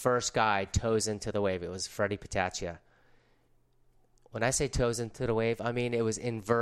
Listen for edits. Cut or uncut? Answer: uncut